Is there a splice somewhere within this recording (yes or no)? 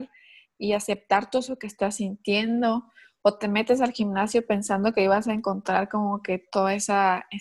no